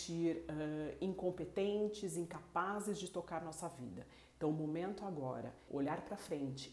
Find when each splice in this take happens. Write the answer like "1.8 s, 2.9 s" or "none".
5.7 s